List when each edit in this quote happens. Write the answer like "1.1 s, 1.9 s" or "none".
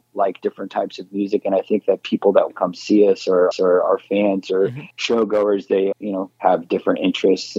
2.5 s, 3.5 s, 4.9 s, 5.9 s, 6.4 s